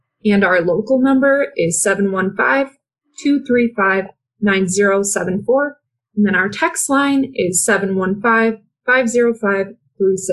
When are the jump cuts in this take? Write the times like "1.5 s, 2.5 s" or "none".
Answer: none